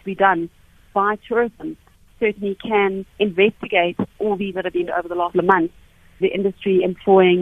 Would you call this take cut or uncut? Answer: cut